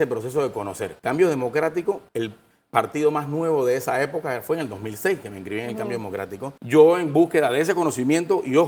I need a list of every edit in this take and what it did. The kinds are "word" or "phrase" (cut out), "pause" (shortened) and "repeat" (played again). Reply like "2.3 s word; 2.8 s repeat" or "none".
1.0 s pause; 2.1 s pause; 6.6 s pause

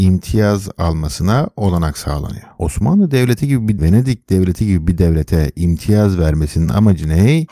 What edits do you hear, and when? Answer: 3.8 s word

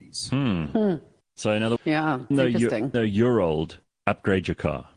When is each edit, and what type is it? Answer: 1.8 s word; 2.3 s word; 2.9 s word

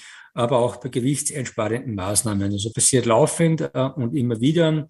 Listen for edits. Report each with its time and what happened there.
2.7 s word

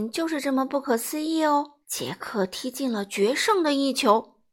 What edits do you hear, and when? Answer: 1.8 s pause

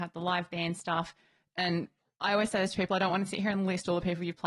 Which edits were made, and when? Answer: none

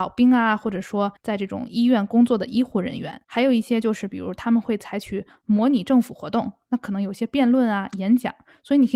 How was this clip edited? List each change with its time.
1.2 s pause; 3.2 s pause

